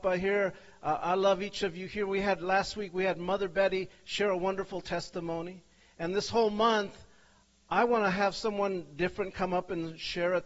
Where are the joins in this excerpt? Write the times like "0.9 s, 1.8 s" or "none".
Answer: none